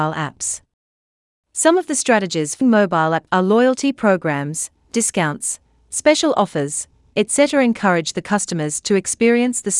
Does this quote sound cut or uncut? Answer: cut